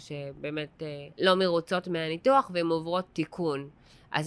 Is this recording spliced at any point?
yes; 1 cut; at 1.1 s

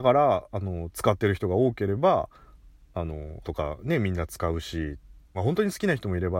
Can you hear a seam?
yes; 2 cuts; at 3.4 s, 5.3 s

